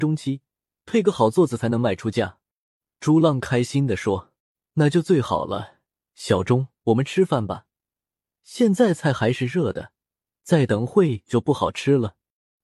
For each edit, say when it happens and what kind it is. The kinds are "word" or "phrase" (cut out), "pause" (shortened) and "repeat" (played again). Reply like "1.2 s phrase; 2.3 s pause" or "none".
4.4 s pause